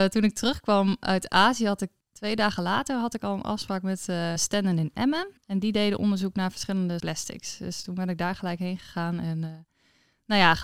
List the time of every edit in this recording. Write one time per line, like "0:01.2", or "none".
0:02.0
0:04.4
0:05.4
0:07.0